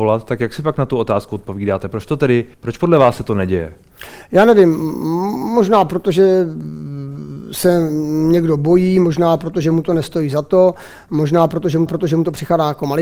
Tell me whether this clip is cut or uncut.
cut